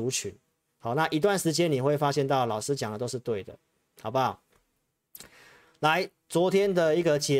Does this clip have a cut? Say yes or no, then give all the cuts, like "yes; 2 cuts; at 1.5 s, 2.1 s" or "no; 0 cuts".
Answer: no; 0 cuts